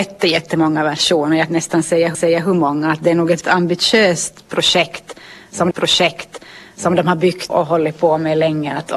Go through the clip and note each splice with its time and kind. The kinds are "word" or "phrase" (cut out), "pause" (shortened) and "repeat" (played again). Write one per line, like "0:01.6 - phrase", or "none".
0:01.5 - phrase
0:02.1 - repeat
0:03.4 - word
0:05.7 - repeat
0:07.5 - word